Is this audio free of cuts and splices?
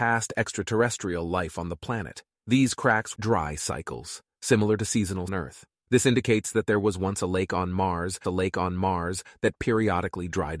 no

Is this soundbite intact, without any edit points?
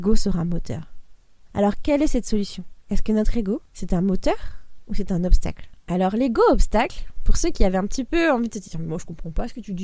no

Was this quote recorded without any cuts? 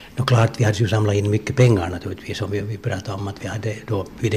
yes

